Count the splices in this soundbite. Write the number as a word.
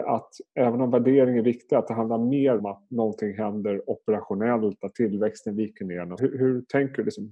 two